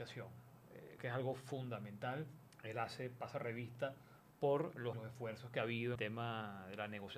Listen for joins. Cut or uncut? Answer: cut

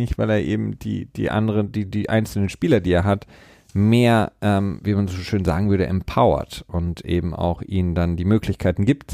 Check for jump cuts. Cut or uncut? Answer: uncut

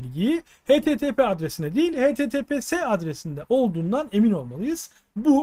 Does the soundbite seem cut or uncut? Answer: uncut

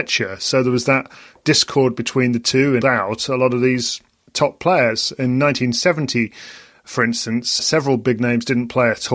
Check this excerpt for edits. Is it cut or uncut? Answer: cut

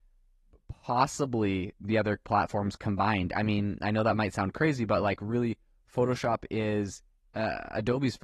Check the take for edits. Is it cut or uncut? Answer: uncut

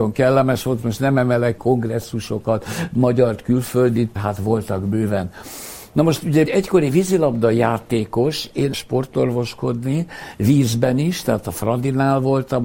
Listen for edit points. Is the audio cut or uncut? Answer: cut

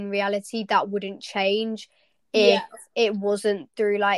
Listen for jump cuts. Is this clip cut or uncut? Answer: uncut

